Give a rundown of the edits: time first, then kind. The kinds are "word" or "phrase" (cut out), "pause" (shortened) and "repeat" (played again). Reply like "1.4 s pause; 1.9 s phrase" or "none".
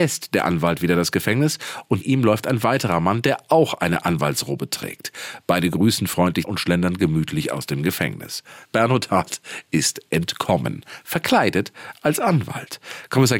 2.0 s word; 6.4 s phrase; 8.6 s pause